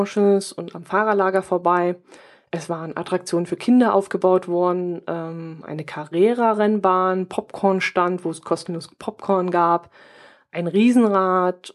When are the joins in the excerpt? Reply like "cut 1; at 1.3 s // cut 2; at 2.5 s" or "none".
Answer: none